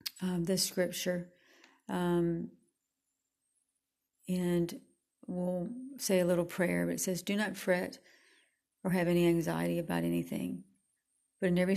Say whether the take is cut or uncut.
uncut